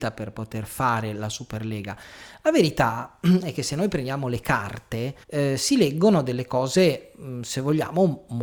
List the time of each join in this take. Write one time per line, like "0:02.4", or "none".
0:05.2